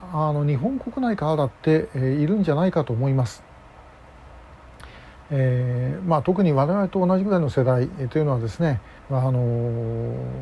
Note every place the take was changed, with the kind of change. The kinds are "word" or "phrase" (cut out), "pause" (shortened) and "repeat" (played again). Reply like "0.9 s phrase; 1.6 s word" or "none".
9.0 s pause